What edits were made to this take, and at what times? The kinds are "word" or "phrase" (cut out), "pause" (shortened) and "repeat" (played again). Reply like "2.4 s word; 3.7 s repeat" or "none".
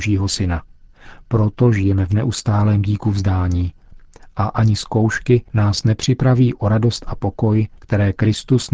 none

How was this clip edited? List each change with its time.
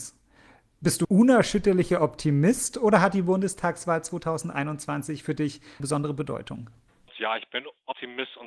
1.0 s word; 5.8 s word

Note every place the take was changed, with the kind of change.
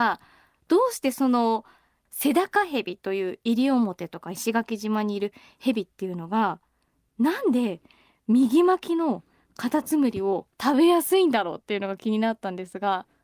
10.5 s pause

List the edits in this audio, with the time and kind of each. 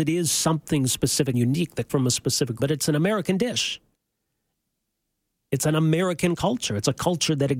1.3 s word; 1.9 s word; 2.6 s word

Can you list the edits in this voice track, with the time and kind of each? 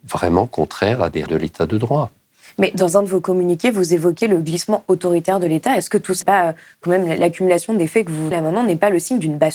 1.3 s word; 6.2 s word; 8.3 s word

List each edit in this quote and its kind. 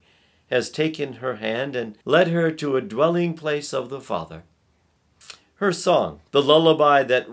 2.0 s pause; 6.3 s pause

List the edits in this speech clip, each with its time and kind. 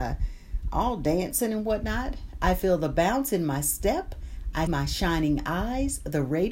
4.7 s word

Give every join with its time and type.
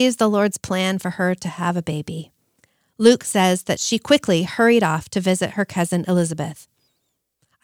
none

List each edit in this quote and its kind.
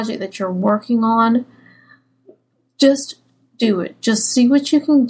none

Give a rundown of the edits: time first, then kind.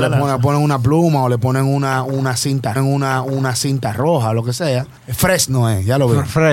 2.8 s repeat; 5.0 s pause

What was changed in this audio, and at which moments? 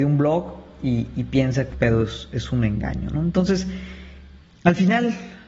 1.1 s word; 1.7 s phrase; 4.4 s word

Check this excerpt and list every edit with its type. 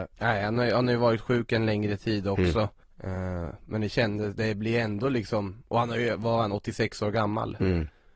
2.8 s pause

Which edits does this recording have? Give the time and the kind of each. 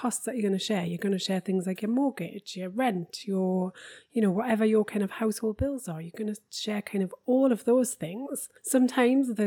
8.6 s pause

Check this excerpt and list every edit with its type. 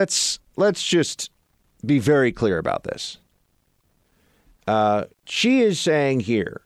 5.1 s pause

